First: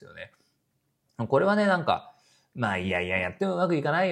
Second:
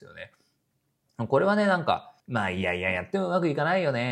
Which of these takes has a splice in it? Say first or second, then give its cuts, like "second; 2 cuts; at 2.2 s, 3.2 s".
second; 1 cut; at 2.2 s